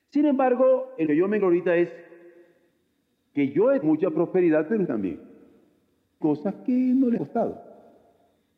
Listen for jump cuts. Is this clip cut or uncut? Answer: cut